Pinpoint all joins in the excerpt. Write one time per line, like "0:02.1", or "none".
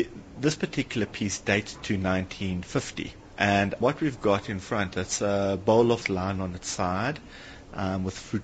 0:03.8
0:06.0